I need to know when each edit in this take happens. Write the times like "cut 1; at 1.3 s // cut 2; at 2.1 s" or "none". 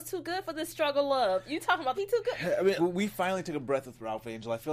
cut 1; at 1.9 s // cut 2; at 2.8 s